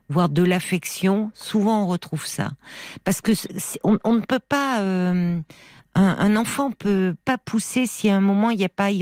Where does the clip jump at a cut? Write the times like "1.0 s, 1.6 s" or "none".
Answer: none